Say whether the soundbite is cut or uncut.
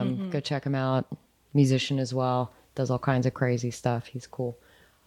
uncut